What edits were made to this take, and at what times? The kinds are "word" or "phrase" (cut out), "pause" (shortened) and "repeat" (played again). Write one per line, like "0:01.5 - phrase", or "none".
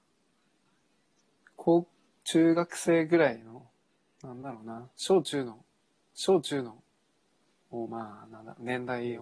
0:06.1 - repeat